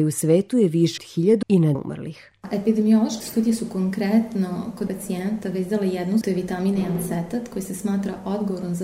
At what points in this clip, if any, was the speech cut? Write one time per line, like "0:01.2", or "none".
0:01.0
0:01.4
0:01.7
0:03.2
0:04.9
0:06.2